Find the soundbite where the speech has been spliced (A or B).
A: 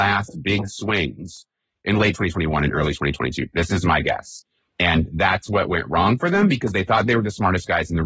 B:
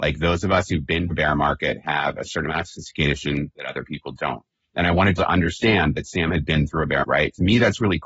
B